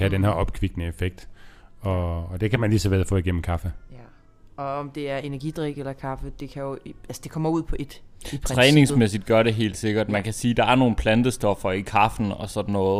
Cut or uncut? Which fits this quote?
uncut